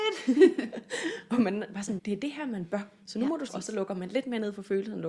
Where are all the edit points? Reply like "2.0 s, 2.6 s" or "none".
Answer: 2.0 s, 3.5 s